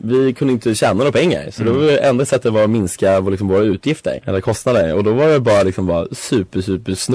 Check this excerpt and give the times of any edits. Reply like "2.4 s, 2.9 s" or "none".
none